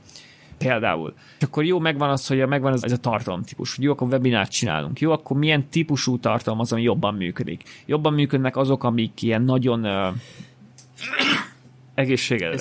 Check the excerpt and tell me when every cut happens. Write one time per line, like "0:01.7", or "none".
0:01.4
0:02.8